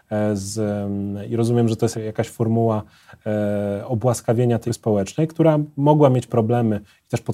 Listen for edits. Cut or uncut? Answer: cut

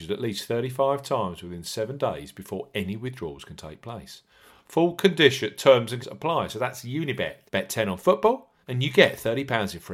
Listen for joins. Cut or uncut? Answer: cut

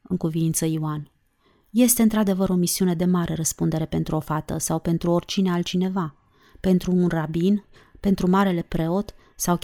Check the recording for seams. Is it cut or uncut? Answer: uncut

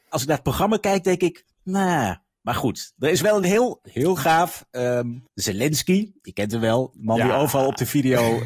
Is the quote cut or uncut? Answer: cut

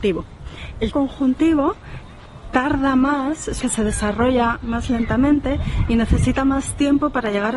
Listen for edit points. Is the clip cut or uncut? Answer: cut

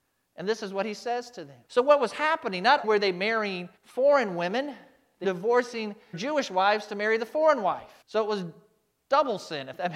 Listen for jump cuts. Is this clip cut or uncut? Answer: cut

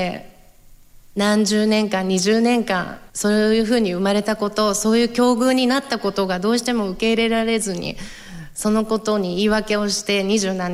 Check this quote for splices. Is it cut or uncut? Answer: cut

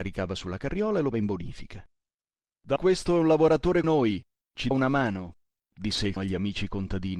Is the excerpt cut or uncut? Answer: cut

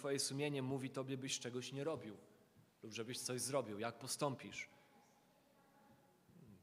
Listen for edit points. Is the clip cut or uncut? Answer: uncut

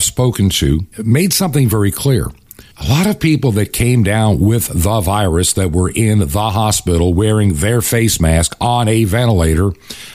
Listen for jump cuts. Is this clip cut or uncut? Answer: cut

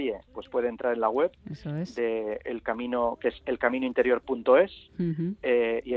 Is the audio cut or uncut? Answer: uncut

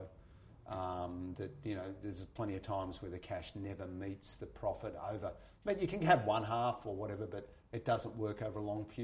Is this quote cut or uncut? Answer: cut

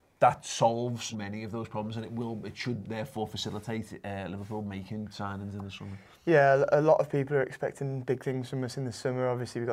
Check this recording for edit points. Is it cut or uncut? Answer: cut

